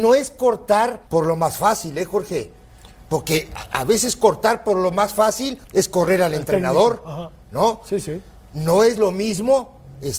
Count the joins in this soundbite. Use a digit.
2